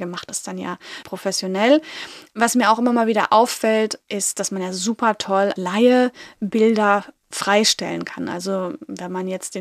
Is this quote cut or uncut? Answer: cut